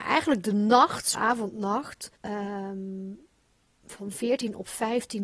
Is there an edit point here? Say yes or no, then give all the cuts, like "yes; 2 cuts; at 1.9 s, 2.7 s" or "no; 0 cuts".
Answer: yes; 2 cuts; at 1.1 s, 2.2 s